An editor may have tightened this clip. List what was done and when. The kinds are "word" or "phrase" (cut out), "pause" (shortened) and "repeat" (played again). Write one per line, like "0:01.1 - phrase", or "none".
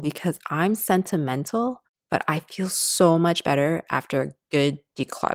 none